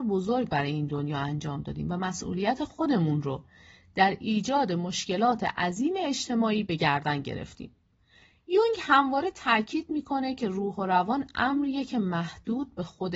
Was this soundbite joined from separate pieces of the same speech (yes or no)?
no